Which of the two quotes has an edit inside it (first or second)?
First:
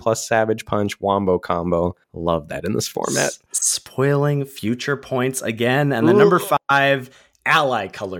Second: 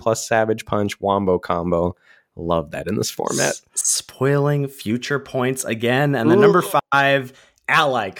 first